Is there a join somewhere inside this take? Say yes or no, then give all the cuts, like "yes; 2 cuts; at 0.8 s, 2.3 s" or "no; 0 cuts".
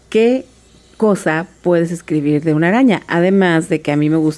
no; 0 cuts